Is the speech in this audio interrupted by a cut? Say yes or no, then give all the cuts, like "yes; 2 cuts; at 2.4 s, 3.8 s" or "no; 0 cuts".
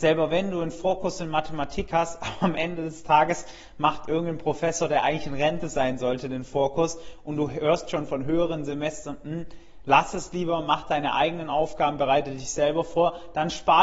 no; 0 cuts